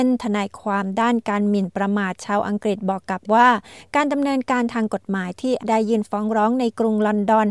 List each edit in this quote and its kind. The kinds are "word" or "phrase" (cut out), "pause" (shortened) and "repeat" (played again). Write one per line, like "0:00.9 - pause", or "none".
0:03.3 - word
0:05.6 - phrase

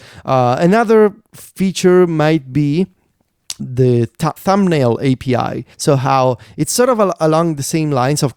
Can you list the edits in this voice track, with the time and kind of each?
0:03.6 - word
0:04.4 - word
0:05.7 - pause

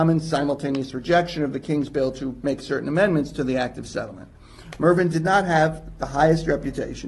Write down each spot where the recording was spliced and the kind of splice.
none

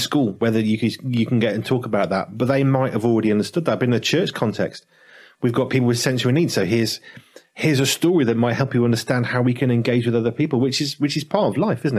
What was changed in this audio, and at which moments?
none

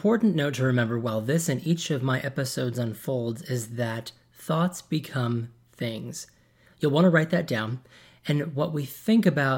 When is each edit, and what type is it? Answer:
none

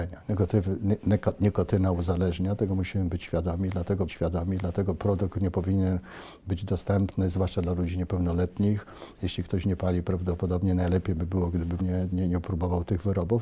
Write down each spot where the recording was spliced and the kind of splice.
0:04.1 - repeat
0:11.8 - word
0:12.1 - word

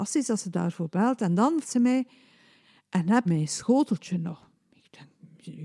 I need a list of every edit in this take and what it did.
0:01.6 - word
0:03.3 - word

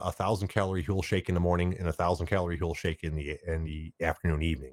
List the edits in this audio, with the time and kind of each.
none

